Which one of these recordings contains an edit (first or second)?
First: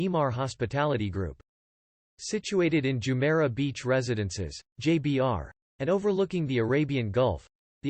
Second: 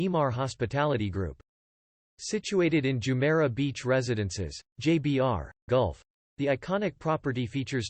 second